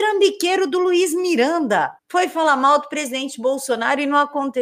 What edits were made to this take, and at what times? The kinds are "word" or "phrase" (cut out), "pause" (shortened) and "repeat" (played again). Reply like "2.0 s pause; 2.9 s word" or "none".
2.0 s pause